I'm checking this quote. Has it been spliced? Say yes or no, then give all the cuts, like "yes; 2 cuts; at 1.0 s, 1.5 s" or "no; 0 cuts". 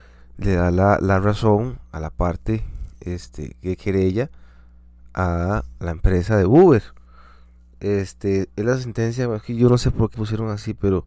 yes; 1 cut; at 10.1 s